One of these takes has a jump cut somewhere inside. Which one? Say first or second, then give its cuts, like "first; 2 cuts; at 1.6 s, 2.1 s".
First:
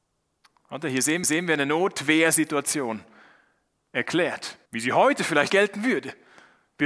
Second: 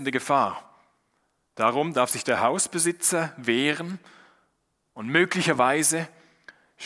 first; 3 cuts; at 1.2 s, 4.7 s, 5.5 s